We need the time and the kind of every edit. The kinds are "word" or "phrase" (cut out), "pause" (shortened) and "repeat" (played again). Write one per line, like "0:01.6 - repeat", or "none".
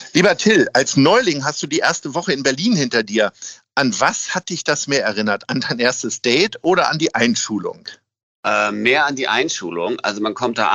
none